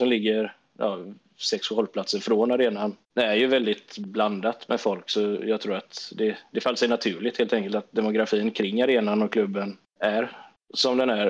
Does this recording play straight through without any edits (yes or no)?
no